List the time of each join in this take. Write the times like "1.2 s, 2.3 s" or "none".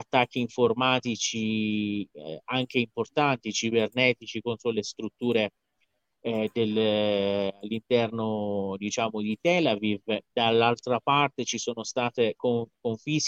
none